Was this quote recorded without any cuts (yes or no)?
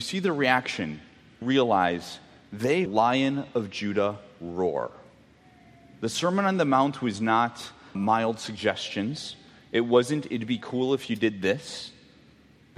no